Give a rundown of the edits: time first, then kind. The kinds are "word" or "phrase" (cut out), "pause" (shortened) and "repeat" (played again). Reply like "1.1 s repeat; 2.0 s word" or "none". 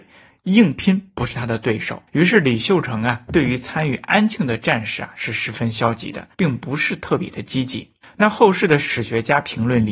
2.1 s pause; 6.3 s pause; 8.0 s pause